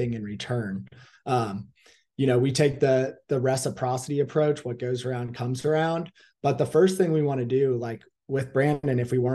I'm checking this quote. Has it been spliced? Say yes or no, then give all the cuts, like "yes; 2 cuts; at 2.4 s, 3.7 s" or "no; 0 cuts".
no; 0 cuts